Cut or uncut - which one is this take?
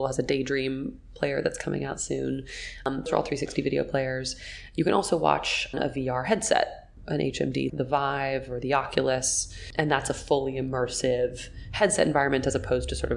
cut